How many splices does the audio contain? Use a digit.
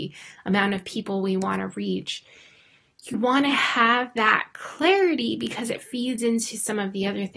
1